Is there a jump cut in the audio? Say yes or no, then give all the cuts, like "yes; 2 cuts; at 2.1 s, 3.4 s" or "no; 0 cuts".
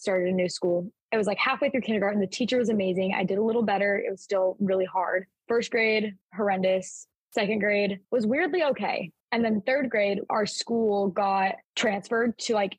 yes; 4 cuts; at 6.2 s, 8.0 s, 9.2 s, 11.6 s